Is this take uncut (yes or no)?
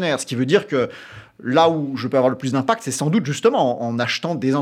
yes